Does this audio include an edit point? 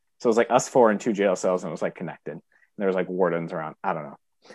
no; 0 cuts

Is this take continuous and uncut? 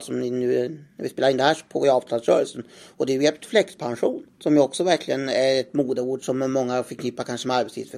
no; 1 cut; at 4.3 s

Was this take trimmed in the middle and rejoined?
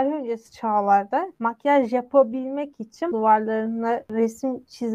yes; 2 cuts; at 1.3 s, 3.1 s

